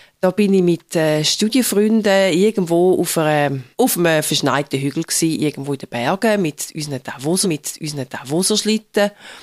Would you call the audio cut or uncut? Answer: cut